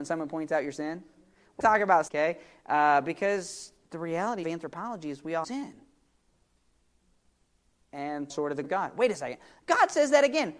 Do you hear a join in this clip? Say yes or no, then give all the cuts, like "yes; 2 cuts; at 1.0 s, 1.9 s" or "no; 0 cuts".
yes; 7 cuts; at 1.6 s, 2.1 s, 3.9 s, 4.4 s, 5.4 s, 8.3 s, 8.6 s